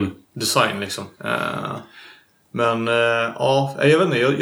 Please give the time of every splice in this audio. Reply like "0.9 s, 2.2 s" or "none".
1.1 s